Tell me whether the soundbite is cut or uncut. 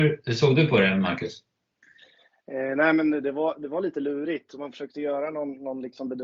uncut